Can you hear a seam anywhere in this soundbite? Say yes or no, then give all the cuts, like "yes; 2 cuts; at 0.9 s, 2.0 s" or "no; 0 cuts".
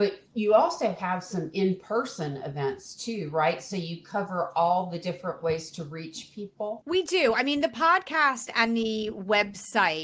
no; 0 cuts